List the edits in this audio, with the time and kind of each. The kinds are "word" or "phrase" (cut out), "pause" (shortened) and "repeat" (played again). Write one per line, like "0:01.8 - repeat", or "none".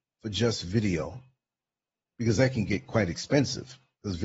none